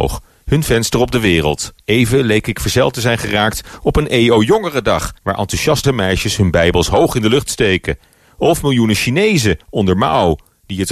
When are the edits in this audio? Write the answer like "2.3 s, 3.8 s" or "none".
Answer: 1.8 s, 5.2 s, 5.8 s